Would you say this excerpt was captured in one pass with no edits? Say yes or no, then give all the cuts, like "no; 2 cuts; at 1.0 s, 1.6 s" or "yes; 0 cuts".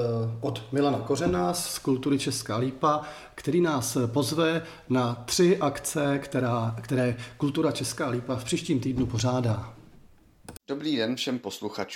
no; 1 cut; at 10.6 s